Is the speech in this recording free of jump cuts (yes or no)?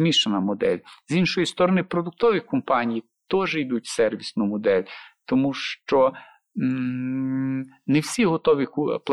yes